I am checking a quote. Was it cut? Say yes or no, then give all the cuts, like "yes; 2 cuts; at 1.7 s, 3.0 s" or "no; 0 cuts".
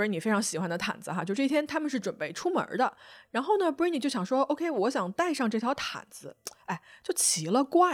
no; 0 cuts